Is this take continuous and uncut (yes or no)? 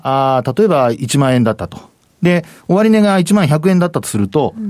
yes